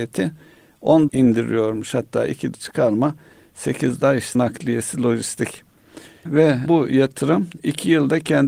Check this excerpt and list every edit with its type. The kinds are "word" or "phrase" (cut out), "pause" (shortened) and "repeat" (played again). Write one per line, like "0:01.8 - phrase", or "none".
0:01.1 - word
0:02.5 - word
0:04.0 - word
0:04.3 - word
0:06.3 - word
0:06.7 - word